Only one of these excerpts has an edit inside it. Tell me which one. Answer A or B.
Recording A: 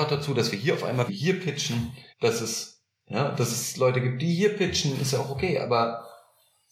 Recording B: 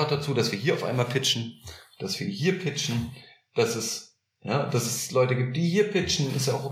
A